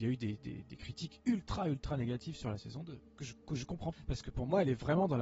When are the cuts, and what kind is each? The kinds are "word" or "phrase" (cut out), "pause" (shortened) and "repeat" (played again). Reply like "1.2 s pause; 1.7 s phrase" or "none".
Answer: 3.9 s word

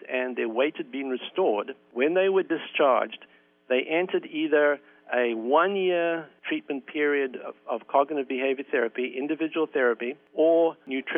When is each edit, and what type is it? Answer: none

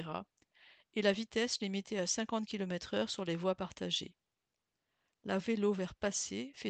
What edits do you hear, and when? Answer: 5.4 s word

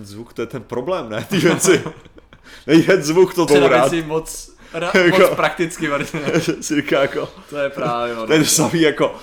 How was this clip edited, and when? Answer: 3.5 s phrase

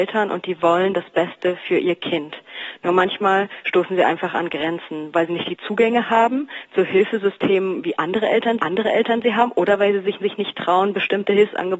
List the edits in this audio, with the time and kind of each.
5.3 s word; 8.6 s repeat; 10.2 s repeat

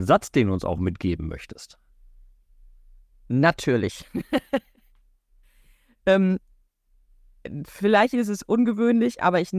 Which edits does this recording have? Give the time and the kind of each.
none

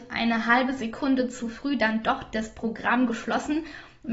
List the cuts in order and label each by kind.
none

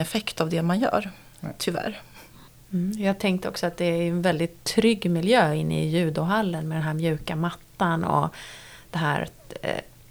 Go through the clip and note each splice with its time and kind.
none

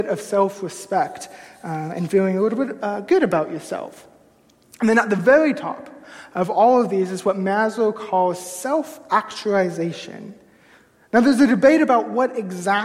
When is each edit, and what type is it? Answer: none

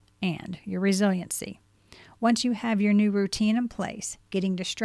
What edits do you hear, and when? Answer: none

